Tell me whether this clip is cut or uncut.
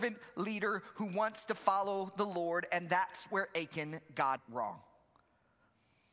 cut